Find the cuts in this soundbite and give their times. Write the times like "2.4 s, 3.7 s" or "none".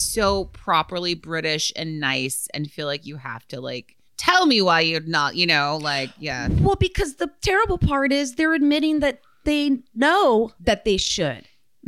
4.1 s, 10.6 s